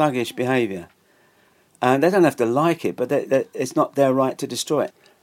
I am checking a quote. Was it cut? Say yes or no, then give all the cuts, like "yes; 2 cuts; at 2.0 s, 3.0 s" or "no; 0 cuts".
no; 0 cuts